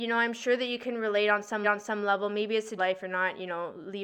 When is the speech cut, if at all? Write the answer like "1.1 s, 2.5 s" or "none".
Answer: 1.6 s, 2.8 s